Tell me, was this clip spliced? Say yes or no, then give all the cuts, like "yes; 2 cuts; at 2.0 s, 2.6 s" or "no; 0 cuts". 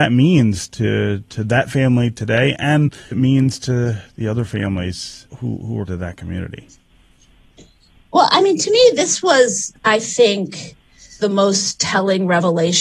yes; 4 cuts; at 3.1 s, 5.3 s, 5.9 s, 11.2 s